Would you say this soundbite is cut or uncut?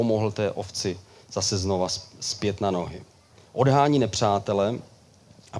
uncut